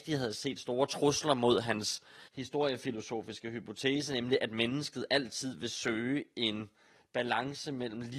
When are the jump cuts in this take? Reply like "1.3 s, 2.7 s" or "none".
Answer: 2.3 s